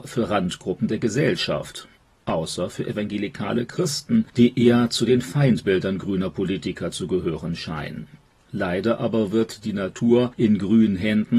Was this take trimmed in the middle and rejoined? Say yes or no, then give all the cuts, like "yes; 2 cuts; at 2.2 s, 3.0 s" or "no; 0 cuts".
no; 0 cuts